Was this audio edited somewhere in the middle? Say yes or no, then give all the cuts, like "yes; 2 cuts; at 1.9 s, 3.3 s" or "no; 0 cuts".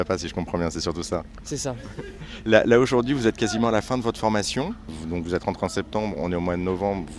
no; 0 cuts